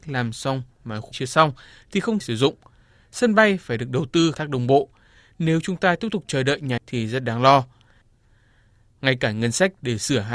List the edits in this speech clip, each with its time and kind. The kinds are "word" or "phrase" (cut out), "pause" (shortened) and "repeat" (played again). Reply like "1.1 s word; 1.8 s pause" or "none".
1.1 s word; 2.2 s word; 4.3 s word; 6.8 s word